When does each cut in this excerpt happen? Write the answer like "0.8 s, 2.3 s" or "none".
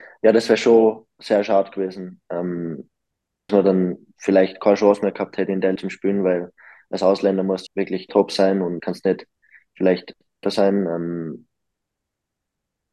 3.5 s, 5.8 s, 7.7 s, 8.1 s, 8.8 s, 10.4 s